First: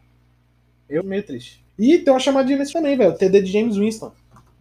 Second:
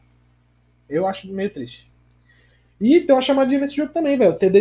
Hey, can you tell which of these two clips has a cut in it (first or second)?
first